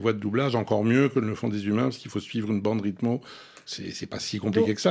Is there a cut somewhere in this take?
no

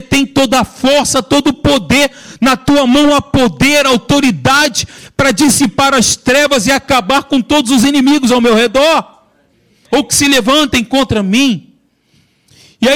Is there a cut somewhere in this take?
no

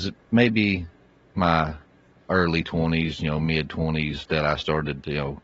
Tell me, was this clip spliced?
no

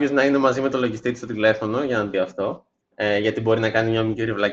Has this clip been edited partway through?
yes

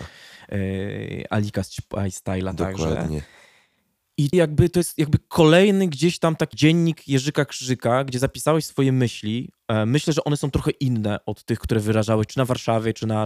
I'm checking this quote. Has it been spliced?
yes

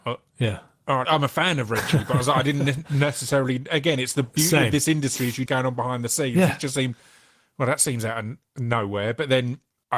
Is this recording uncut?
no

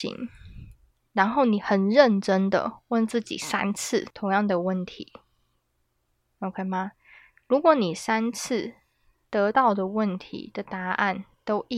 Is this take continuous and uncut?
yes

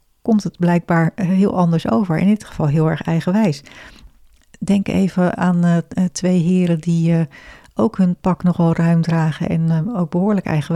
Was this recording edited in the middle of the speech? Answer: no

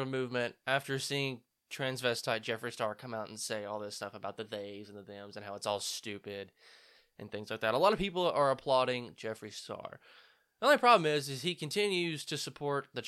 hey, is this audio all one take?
yes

